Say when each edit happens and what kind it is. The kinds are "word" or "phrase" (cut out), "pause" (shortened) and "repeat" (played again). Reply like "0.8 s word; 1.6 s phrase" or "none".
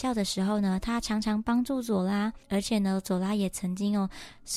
2.4 s pause